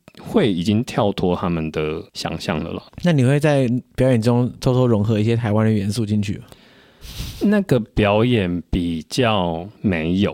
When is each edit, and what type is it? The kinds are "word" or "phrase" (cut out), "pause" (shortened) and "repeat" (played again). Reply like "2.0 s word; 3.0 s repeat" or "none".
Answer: 2.1 s pause; 2.9 s pause